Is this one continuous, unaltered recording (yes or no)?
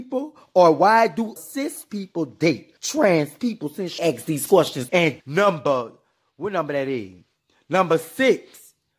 no